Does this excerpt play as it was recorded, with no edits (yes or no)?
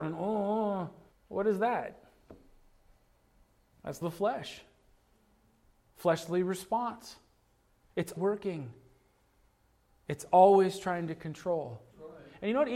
no